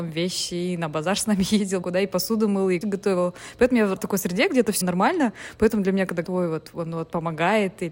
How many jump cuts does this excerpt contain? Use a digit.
5